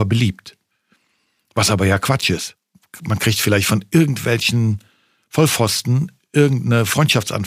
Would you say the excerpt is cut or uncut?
uncut